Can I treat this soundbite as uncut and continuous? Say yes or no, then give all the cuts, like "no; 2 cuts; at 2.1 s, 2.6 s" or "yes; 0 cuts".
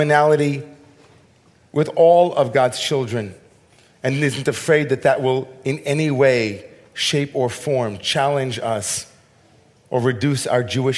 yes; 0 cuts